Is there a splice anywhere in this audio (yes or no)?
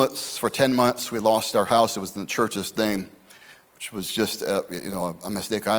no